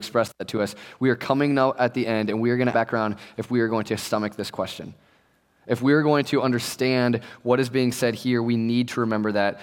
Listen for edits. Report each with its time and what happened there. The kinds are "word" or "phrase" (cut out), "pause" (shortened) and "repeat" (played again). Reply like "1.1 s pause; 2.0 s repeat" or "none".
2.7 s phrase